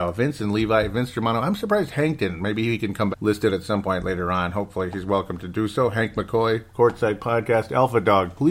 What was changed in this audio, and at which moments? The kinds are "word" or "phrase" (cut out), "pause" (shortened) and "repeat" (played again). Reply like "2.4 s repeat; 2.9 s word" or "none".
3.1 s phrase